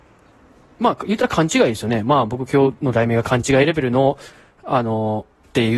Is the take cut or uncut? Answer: uncut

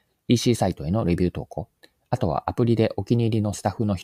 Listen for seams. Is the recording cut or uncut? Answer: uncut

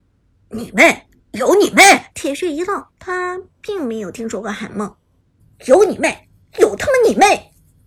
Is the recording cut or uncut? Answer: cut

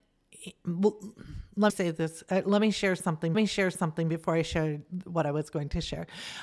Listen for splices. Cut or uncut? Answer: cut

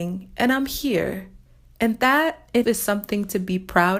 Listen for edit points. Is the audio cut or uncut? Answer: cut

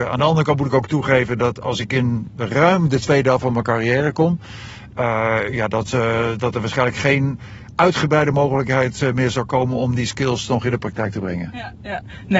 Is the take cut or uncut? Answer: uncut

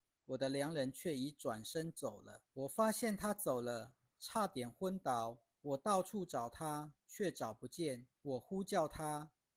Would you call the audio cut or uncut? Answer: cut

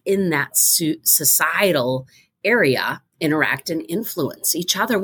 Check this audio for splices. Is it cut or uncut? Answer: cut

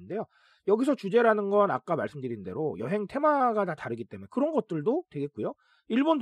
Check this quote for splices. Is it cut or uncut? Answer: uncut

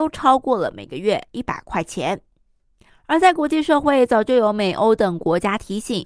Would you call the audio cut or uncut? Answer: uncut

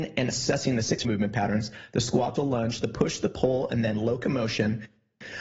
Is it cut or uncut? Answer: cut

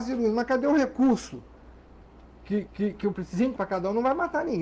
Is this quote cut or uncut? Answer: cut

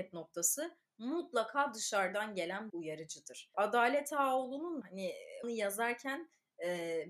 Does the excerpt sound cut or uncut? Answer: cut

